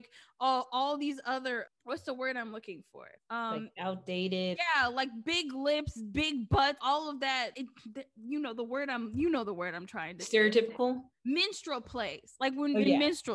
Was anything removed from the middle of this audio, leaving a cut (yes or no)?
yes